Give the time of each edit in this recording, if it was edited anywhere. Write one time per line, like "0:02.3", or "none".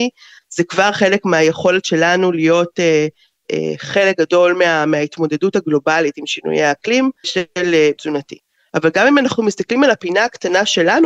0:07.2
0:08.0